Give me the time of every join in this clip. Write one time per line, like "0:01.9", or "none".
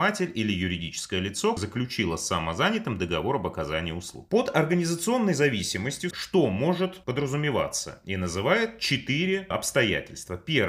0:01.6
0:06.1